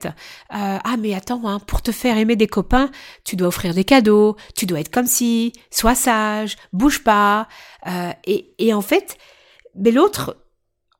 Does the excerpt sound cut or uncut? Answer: uncut